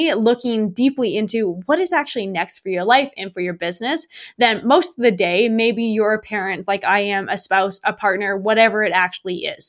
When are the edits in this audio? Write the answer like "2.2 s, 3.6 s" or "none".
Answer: none